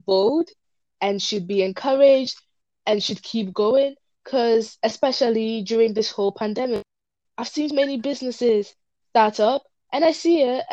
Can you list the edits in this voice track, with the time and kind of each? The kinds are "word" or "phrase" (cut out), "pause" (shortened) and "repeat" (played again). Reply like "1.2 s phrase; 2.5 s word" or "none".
7.2 s word; 7.7 s word